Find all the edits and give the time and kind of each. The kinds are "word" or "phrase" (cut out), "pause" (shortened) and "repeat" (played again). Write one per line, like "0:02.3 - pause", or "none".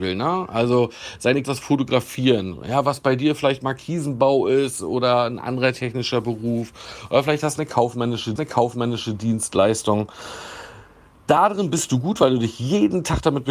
0:01.4 - word
0:08.4 - repeat